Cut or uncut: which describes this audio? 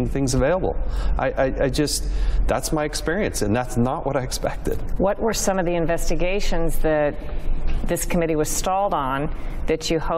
uncut